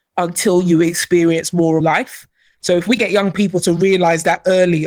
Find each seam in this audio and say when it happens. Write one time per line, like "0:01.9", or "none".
0:01.8
0:03.0